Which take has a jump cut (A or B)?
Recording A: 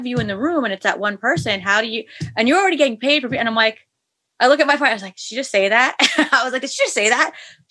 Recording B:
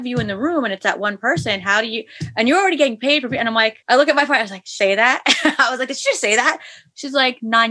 B